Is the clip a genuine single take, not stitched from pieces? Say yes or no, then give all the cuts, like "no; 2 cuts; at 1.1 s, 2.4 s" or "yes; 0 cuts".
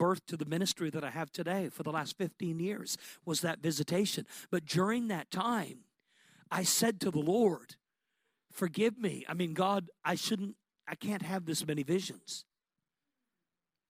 yes; 0 cuts